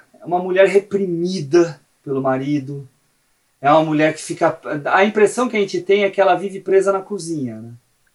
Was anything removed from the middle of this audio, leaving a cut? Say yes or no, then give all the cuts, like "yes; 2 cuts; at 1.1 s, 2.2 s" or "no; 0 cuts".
no; 0 cuts